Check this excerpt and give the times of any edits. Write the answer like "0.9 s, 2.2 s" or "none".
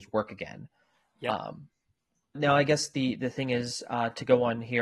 2.3 s